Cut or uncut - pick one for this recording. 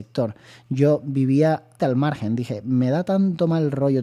cut